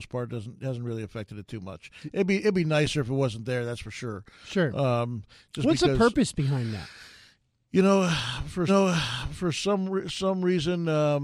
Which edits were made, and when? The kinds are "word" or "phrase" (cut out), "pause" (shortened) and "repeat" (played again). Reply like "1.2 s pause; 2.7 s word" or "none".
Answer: 8.7 s repeat